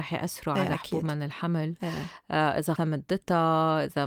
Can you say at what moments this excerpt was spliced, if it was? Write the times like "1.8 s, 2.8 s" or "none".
2.8 s